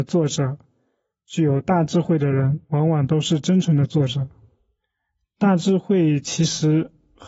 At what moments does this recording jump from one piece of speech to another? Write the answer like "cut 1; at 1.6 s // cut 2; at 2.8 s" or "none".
cut 1; at 2.6 s